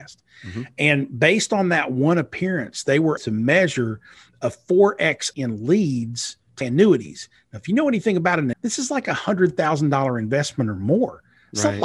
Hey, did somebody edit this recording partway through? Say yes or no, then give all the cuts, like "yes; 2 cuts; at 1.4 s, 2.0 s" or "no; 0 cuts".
yes; 4 cuts; at 3.2 s, 5.3 s, 6.6 s, 8.5 s